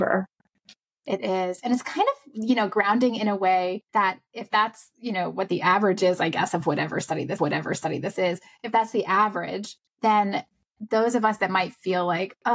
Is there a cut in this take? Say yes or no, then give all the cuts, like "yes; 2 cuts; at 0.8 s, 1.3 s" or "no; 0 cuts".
yes; 3 cuts; at 3.9 s, 7.4 s, 9.9 s